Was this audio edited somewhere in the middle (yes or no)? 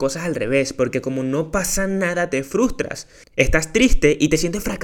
no